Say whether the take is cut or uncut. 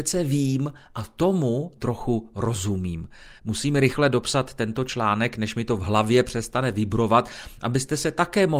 cut